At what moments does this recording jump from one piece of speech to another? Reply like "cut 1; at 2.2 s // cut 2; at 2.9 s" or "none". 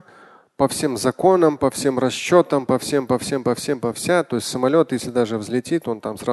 cut 1; at 3.9 s